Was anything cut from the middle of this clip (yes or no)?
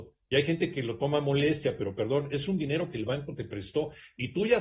no